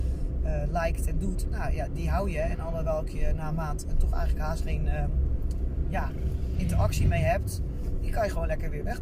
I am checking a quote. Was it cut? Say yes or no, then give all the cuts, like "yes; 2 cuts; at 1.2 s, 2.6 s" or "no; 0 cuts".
no; 0 cuts